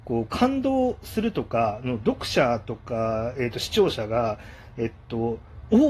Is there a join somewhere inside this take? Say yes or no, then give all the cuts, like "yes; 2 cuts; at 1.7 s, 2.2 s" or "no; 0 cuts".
no; 0 cuts